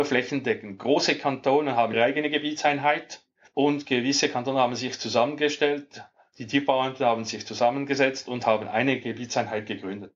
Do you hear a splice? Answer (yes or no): no